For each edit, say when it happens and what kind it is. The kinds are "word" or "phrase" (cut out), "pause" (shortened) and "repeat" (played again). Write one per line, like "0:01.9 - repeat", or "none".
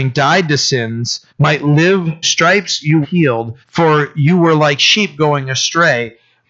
0:01.3 - pause
0:02.2 - phrase
0:03.0 - word
0:03.6 - pause